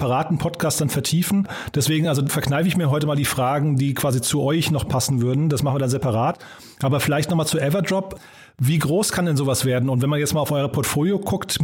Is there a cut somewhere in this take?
no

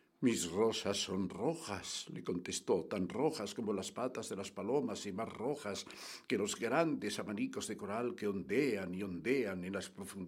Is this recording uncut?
yes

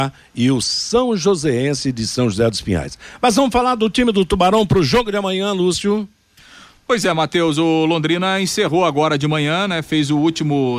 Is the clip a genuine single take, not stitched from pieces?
yes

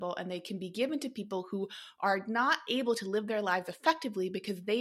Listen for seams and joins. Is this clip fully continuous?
yes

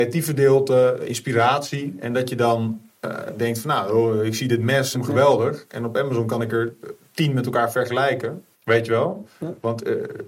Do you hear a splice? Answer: yes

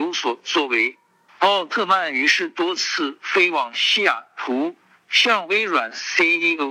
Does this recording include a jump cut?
no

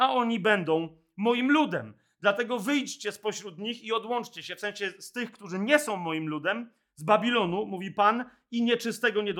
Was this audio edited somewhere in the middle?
no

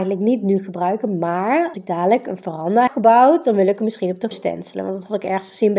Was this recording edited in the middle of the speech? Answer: yes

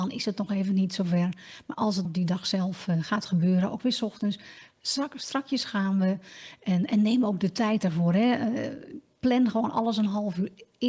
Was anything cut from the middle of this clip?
yes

